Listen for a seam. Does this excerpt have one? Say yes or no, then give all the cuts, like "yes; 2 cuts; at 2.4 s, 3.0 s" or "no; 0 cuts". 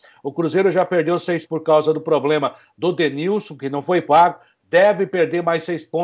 yes; 1 cut; at 1.5 s